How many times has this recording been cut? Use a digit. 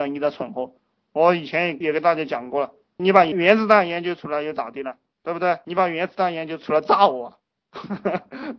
0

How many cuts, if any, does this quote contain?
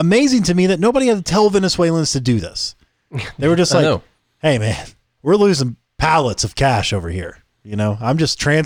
1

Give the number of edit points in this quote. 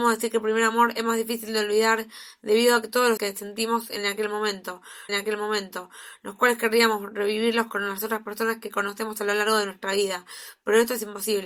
2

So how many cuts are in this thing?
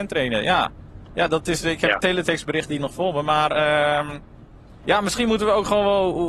0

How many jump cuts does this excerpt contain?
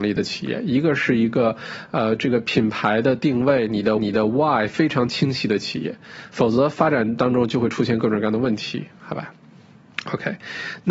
1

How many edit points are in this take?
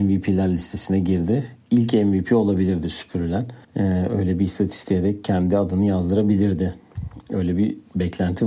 1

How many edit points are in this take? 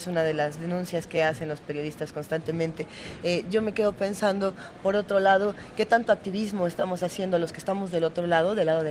0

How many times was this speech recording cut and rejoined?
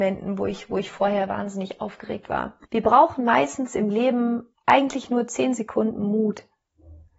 2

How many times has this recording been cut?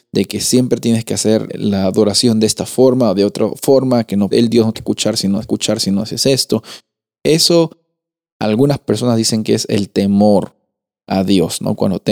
4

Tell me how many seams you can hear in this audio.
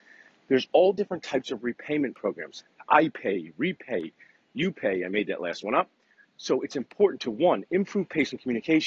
0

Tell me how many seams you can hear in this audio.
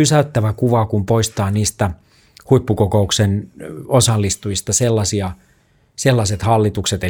0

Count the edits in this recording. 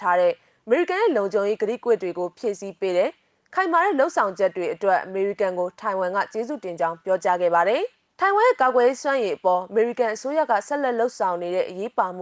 1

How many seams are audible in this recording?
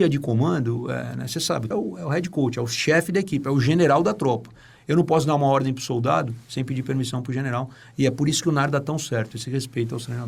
1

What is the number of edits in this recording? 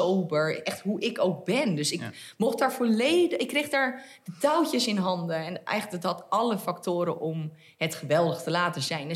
0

